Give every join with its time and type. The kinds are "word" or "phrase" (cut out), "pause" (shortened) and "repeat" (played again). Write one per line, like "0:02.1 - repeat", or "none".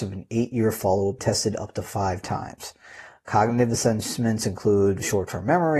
0:01.2 - phrase